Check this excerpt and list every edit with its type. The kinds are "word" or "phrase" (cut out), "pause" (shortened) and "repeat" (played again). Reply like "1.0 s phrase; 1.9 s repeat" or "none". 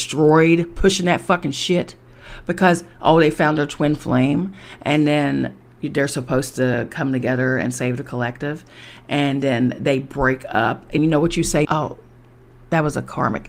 11.0 s word; 11.6 s word